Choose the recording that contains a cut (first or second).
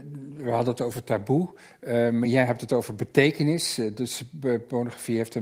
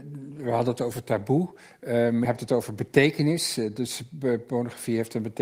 second